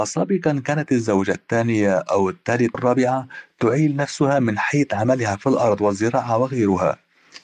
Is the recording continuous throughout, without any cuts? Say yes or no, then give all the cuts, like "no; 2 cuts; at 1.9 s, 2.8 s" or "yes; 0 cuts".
no; 1 cut; at 2.7 s